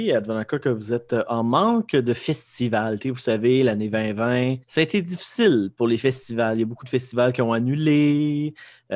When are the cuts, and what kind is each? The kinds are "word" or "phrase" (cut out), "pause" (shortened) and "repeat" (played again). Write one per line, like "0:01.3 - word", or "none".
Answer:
0:04.6 - pause